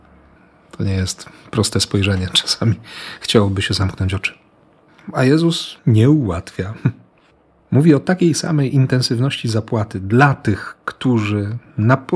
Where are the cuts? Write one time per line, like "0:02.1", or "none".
0:05.8